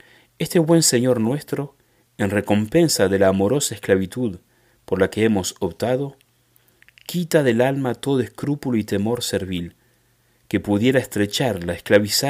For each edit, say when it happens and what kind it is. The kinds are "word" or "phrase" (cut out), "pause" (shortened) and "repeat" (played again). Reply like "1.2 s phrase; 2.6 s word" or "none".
none